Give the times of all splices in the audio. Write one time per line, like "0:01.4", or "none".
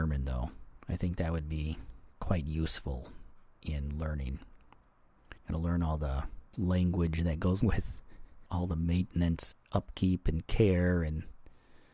0:02.1
0:05.4
0:06.5
0:07.6
0:08.5
0:09.5